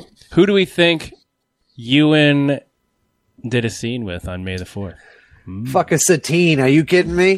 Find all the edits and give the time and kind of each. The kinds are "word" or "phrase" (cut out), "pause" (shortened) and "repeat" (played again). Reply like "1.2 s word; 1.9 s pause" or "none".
none